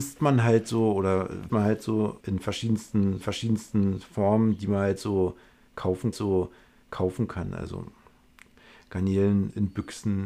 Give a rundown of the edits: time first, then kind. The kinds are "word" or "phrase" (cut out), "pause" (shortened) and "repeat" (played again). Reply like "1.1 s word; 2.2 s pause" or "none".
1.5 s word; 2.2 s word; 3.2 s repeat; 6.1 s repeat